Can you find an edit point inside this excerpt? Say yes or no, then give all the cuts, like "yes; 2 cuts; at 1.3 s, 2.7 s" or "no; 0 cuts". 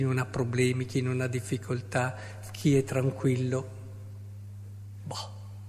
no; 0 cuts